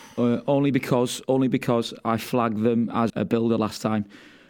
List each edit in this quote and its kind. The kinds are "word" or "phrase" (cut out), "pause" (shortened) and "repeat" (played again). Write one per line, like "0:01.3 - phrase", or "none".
0:03.1 - word